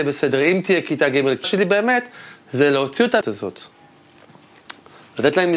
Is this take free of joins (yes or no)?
no